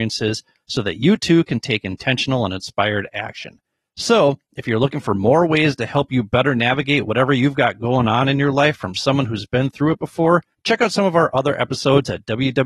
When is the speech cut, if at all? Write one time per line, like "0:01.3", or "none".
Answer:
0:10.5

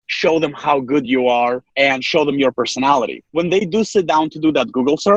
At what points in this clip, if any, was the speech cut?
none

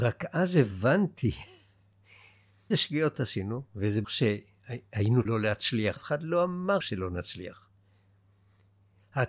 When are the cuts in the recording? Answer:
0:02.7
0:03.1
0:04.0
0:05.3
0:06.0
0:06.8

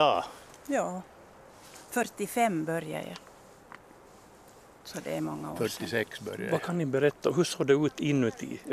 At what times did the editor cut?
none

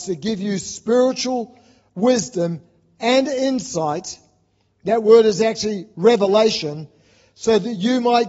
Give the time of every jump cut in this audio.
none

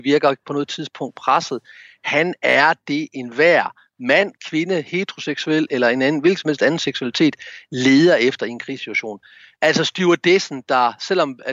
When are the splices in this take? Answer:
none

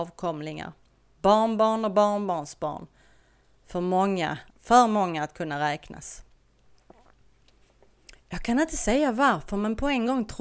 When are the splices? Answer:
0:04.5
0:08.2

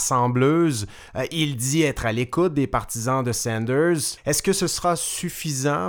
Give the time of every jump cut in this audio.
none

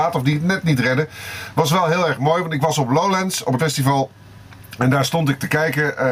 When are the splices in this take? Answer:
0:03.6

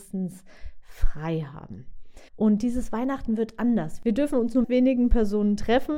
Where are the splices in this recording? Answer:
0:02.3
0:04.6

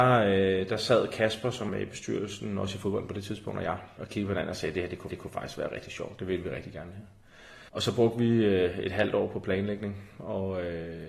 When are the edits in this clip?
0:01.7
0:04.0
0:05.1
0:07.7

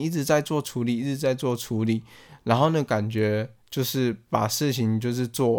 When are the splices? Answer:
0:03.6

